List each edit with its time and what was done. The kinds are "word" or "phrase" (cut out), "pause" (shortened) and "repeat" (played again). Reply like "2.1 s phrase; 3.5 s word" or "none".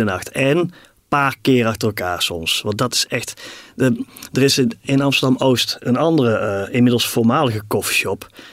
none